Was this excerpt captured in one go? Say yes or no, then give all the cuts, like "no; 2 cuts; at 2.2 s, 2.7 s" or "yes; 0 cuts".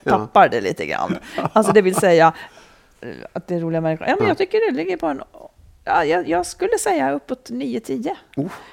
yes; 0 cuts